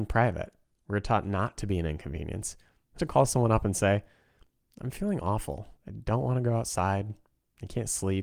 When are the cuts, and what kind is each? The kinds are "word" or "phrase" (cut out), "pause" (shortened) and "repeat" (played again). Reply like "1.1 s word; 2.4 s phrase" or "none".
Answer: 3.0 s word; 5.8 s pause